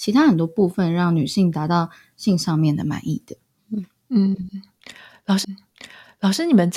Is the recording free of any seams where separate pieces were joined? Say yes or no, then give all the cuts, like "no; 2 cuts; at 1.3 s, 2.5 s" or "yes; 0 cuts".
no; 2 cuts; at 3.5 s, 5.4 s